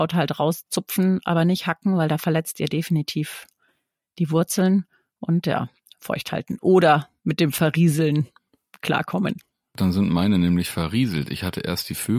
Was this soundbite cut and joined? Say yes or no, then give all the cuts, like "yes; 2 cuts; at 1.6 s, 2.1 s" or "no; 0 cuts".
no; 0 cuts